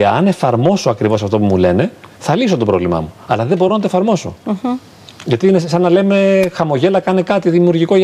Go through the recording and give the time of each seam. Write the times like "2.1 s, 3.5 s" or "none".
none